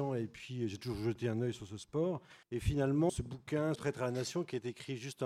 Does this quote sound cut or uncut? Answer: cut